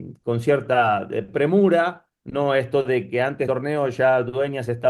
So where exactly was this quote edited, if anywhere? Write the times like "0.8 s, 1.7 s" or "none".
3.5 s